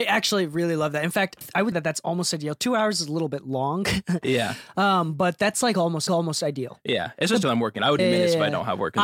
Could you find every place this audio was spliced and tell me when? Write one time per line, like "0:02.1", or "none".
0:01.4
0:01.7
0:06.1
0:07.4
0:08.0